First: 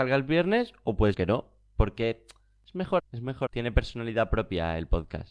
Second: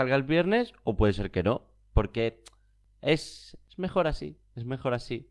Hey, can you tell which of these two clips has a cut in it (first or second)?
first